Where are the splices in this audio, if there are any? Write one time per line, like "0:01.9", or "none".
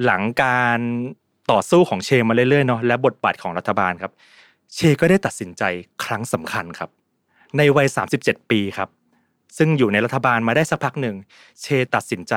none